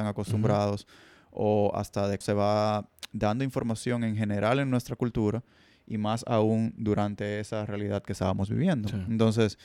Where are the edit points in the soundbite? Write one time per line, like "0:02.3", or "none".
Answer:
0:02.2